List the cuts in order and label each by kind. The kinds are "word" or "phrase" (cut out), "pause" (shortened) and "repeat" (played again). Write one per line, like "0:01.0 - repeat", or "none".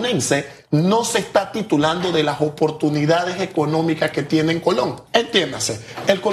0:05.1 - pause